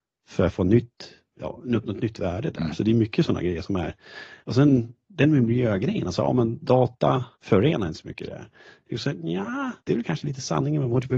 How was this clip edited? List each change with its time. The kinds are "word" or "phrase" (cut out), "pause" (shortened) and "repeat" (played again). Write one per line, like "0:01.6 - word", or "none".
0:04.4 - pause
0:07.3 - pause
0:09.8 - pause

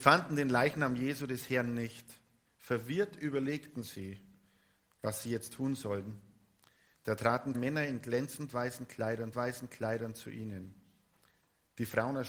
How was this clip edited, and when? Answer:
0:07.5 - word
0:09.3 - repeat

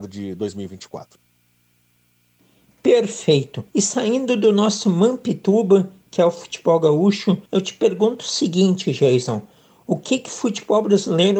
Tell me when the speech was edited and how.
0:03.7 - pause
0:07.5 - pause

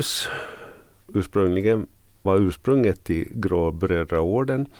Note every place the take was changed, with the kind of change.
0:01.0 - word
0:02.3 - word

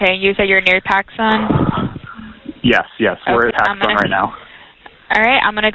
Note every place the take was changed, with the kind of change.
0:03.5 - word

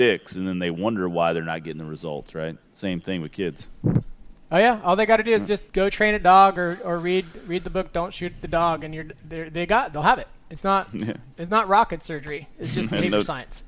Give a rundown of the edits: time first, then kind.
0:05.7 - pause

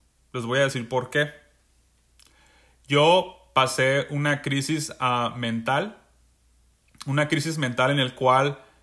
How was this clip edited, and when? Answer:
none

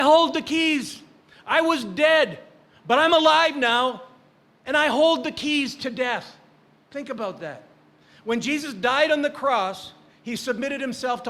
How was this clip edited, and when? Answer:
none

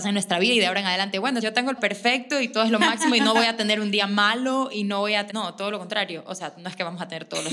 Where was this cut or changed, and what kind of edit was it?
0:01.4 - word
0:01.8 - phrase
0:05.3 - word

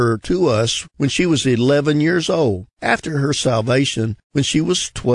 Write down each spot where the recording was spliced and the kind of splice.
0:02.7 - pause

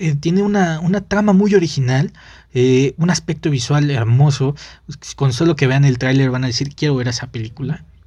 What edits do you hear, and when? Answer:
none

